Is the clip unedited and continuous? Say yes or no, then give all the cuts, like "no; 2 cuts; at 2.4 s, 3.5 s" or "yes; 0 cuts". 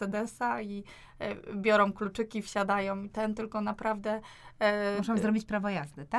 yes; 0 cuts